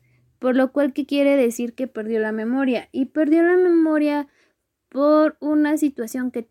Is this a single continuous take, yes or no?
yes